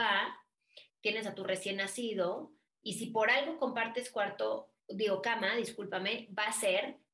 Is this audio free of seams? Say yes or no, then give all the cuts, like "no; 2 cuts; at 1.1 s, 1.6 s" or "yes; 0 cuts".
yes; 0 cuts